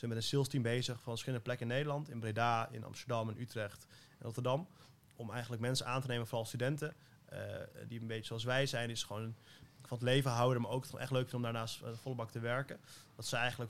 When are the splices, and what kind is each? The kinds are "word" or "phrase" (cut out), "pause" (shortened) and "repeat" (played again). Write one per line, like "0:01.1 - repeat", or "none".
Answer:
none